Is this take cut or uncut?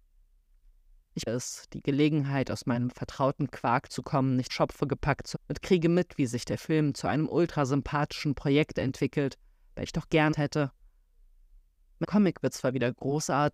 cut